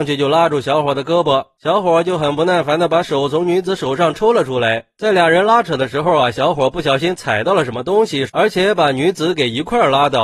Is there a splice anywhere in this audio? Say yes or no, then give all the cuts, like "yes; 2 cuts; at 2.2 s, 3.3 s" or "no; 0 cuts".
yes; 1 cut; at 8.3 s